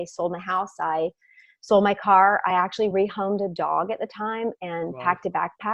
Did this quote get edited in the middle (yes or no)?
no